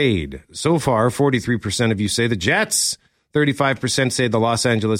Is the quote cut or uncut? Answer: uncut